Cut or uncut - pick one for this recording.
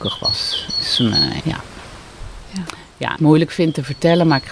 cut